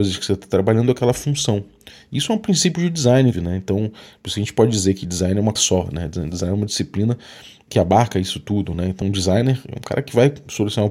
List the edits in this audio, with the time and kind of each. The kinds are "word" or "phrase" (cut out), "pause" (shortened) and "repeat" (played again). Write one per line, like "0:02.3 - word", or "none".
0:03.3 - word
0:05.6 - word
0:07.7 - word
0:09.0 - word

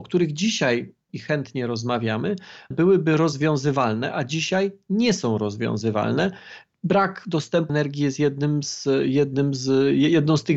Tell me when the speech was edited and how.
0:01.1 - word
0:02.7 - word
0:07.7 - word

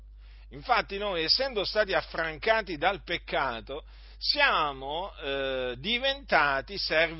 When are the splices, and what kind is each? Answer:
none

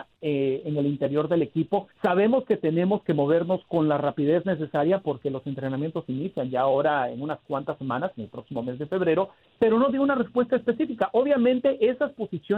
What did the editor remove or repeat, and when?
0:01.9 - pause
0:06.0 - word
0:09.6 - word

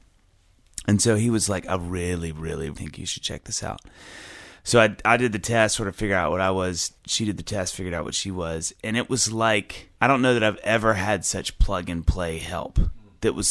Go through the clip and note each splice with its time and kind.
0:02.7 - word
0:07.0 - pause
0:10.0 - pause

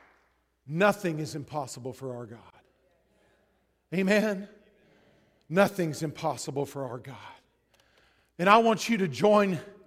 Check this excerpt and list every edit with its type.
none

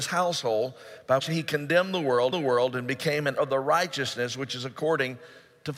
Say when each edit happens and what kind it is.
0:01.2 - word
0:02.3 - repeat
0:03.4 - word

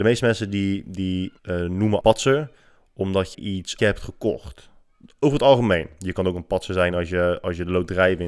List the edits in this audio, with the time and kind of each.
0:01.4 - pause
0:02.0 - phrase
0:03.3 - word
0:03.8 - phrase

